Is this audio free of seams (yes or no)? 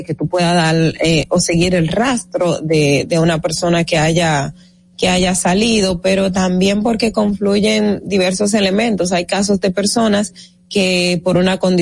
yes